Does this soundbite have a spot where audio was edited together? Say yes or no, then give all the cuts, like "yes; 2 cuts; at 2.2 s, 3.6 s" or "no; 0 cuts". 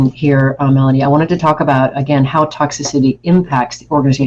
no; 0 cuts